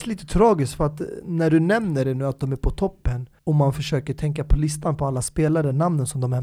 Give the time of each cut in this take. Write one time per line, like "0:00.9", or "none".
0:03.4

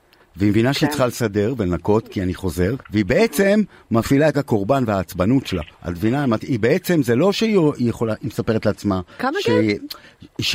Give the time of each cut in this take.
0:02.8
0:04.3
0:05.7

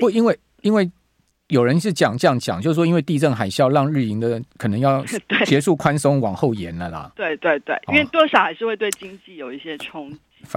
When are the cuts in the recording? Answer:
none

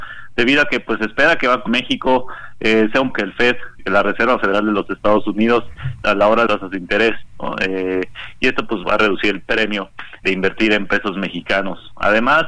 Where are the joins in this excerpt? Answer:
0:01.7
0:03.1
0:03.8
0:06.0
0:06.5
0:08.8
0:10.2

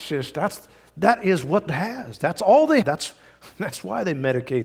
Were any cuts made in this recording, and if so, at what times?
0:01.7
0:02.8

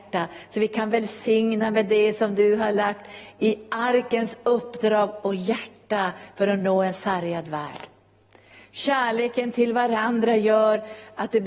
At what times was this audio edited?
none

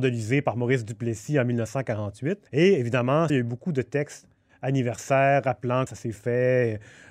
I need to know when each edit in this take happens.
0:02.5
0:03.3
0:05.9

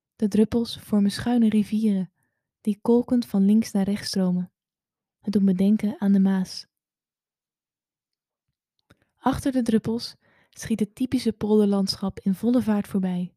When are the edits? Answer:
none

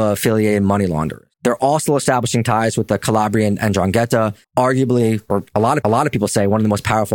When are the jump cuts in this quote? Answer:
0:01.3
0:04.4
0:05.8

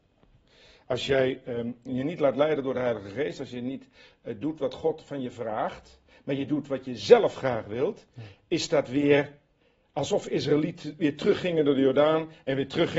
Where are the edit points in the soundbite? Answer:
none

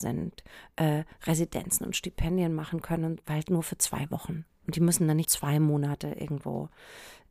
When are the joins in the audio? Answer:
0:05.2

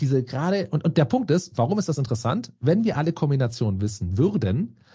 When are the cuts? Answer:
none

